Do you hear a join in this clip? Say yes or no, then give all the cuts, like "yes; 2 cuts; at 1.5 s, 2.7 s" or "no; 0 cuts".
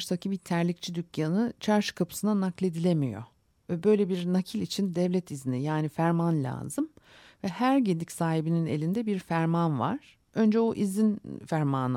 no; 0 cuts